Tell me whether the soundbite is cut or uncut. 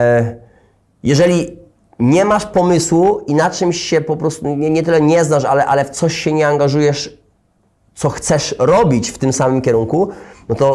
uncut